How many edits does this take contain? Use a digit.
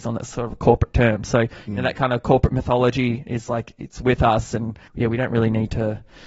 1